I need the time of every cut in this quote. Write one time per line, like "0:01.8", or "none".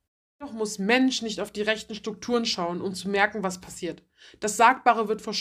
none